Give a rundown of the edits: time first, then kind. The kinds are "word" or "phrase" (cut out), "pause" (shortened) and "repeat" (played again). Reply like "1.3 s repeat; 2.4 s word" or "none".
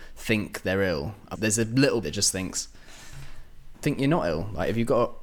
1.3 s word; 2.0 s phrase; 3.7 s word